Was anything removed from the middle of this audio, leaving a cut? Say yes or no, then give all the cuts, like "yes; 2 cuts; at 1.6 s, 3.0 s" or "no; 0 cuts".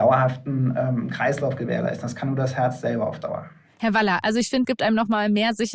yes; 1 cut; at 4.6 s